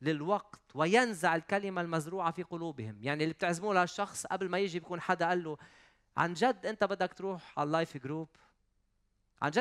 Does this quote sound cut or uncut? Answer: uncut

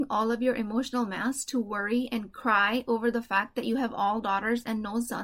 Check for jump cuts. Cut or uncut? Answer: uncut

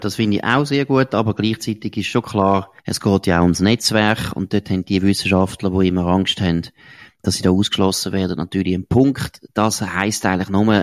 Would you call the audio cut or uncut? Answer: cut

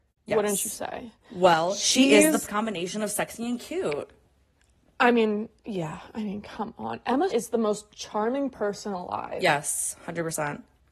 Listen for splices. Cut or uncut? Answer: cut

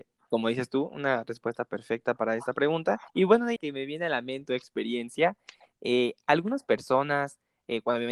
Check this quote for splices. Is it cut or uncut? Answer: cut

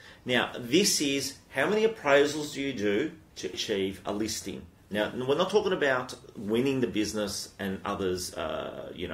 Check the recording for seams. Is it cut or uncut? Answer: cut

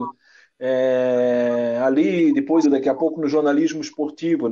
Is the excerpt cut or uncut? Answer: cut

